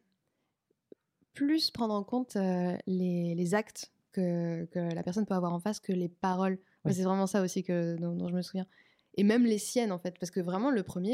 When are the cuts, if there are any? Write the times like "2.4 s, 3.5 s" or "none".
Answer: none